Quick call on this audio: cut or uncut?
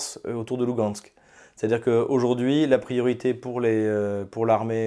uncut